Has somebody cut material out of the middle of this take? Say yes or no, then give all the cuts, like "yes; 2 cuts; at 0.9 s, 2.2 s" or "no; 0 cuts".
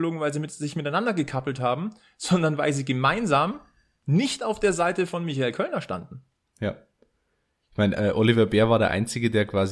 no; 0 cuts